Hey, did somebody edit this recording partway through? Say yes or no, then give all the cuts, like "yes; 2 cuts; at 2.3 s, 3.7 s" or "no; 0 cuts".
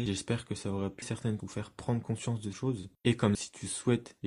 yes; 4 cuts; at 1.0 s, 1.4 s, 2.5 s, 3.3 s